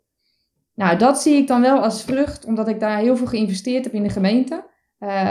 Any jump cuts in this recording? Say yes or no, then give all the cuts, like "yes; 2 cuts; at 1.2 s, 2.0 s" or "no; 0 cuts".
no; 0 cuts